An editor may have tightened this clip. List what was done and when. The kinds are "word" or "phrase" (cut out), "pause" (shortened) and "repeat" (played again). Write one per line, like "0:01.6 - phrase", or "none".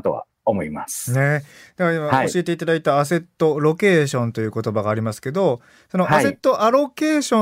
none